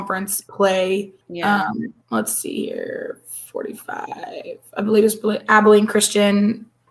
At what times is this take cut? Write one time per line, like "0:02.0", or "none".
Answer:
0:01.2
0:02.0